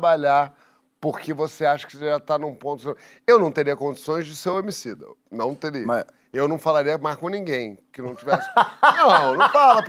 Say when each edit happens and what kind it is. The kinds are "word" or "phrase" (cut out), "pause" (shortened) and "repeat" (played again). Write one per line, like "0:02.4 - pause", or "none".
none